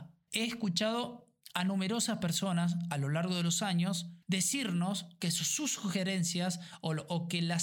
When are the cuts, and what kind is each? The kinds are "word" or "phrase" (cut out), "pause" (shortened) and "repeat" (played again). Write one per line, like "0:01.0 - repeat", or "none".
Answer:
0:04.2 - pause